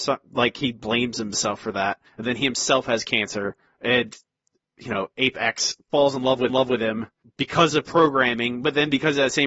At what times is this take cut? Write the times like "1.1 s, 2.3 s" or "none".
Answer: 6.5 s